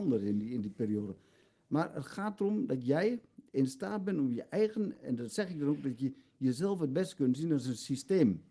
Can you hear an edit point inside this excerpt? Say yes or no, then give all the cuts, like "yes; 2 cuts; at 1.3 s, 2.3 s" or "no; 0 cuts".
no; 0 cuts